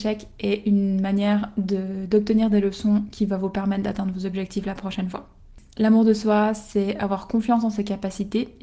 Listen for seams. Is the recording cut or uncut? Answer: uncut